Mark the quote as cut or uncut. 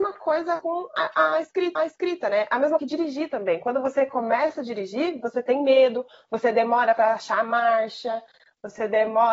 cut